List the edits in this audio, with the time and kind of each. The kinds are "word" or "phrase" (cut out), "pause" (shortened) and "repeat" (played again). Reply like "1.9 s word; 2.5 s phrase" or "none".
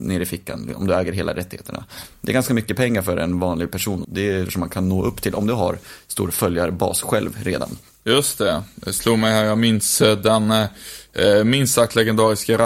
4.0 s word; 4.5 s word

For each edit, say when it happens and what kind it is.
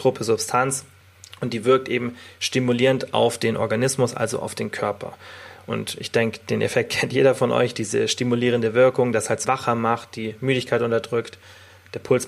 9.4 s phrase

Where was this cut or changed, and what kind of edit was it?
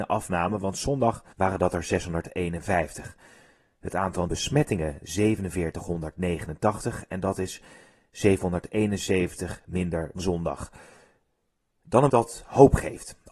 1.3 s pause; 4.3 s word; 10.2 s word; 12.1 s word

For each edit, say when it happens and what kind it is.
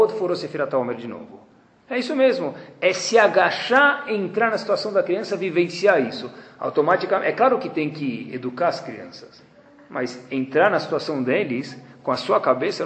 none

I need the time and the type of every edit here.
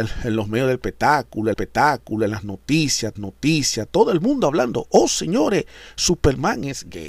1.5 s repeat; 3.2 s repeat

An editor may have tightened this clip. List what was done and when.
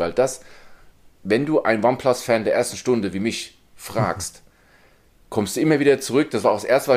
none

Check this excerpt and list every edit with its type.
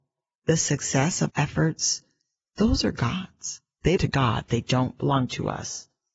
1.3 s word; 4.0 s word

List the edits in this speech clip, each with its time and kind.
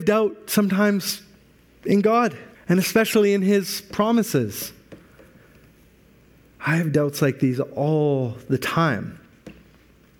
2.5 s pause

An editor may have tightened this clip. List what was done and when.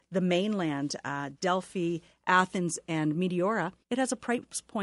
3.8 s pause

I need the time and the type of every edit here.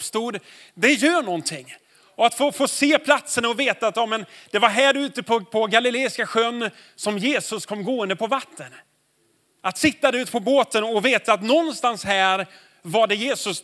none

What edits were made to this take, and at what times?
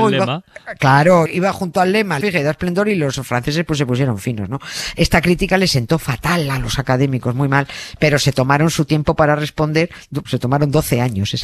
1.3 s word; 2.2 s word; 10.2 s word

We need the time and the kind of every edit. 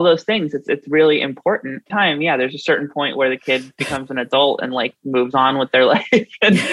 1.9 s phrase

